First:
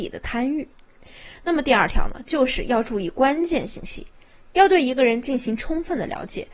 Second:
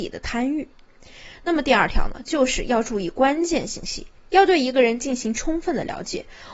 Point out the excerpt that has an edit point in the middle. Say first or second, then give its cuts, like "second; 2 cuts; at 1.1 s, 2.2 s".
second; 1 cut; at 4.2 s